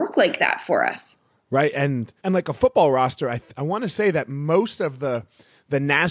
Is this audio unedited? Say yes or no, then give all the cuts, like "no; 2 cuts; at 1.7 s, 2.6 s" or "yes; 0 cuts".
no; 1 cut; at 2.2 s